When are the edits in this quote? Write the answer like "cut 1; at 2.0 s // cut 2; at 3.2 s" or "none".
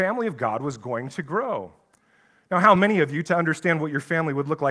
none